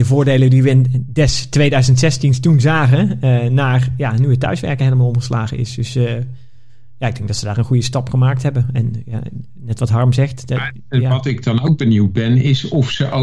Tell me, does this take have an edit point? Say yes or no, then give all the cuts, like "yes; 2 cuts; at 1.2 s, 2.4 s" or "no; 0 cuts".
no; 0 cuts